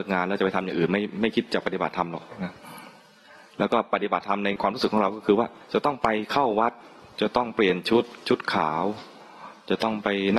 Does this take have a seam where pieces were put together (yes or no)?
no